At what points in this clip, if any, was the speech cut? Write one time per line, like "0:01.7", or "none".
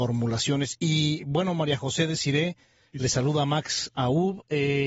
none